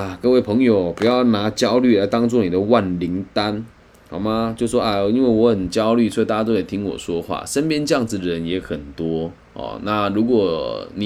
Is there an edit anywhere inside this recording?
no; 0 cuts

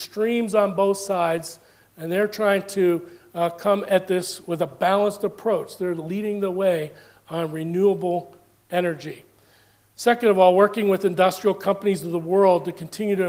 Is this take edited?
no; 0 cuts

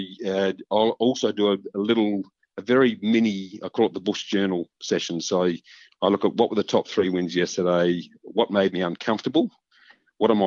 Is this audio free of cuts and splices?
yes; 0 cuts

